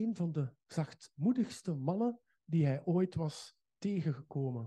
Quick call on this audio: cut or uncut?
uncut